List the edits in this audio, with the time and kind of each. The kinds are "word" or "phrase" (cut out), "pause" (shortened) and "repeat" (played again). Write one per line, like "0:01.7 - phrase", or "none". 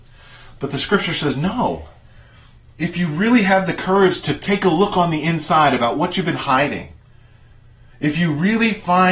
none